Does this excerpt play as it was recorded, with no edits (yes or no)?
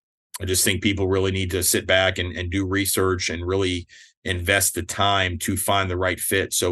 yes